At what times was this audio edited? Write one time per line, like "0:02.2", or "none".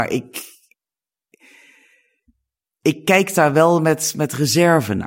none